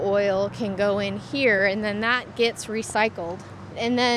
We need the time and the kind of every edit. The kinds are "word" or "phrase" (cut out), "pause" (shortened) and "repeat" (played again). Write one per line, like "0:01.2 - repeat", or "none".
none